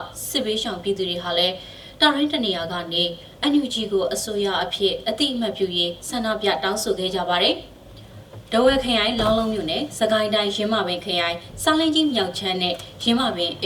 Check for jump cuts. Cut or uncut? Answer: uncut